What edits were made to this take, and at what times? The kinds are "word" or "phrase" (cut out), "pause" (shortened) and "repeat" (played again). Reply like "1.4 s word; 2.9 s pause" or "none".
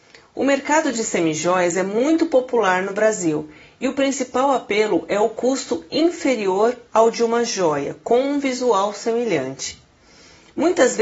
none